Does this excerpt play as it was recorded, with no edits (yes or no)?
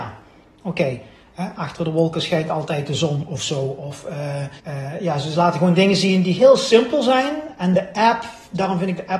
no